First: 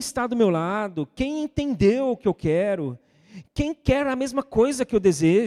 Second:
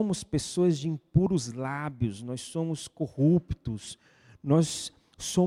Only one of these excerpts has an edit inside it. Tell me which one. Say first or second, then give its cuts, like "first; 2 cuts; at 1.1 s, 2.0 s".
first; 1 cut; at 3.5 s